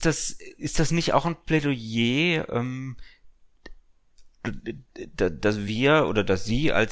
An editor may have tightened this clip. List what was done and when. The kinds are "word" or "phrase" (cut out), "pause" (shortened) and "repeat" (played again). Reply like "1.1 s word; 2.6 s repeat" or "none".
none